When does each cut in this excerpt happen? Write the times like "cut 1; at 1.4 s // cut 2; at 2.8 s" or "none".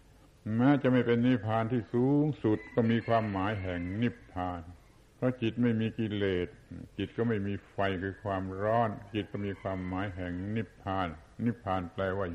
cut 1; at 5.0 s

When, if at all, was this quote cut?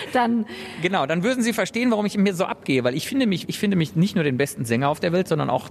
cut 1; at 3.4 s

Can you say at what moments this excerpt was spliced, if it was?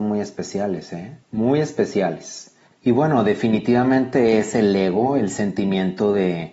cut 1; at 1.2 s // cut 2; at 2.7 s

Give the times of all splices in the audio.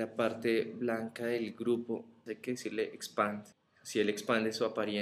cut 1; at 3.5 s

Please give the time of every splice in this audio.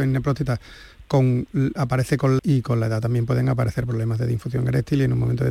cut 1; at 2.4 s

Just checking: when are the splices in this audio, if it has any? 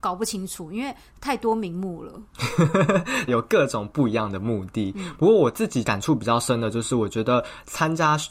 cut 1; at 3.3 s

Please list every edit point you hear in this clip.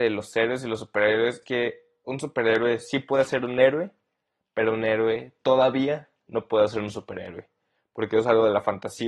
cut 1; at 1.4 s

